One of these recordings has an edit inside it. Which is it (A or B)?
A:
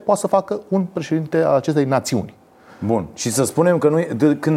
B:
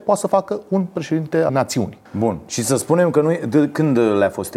B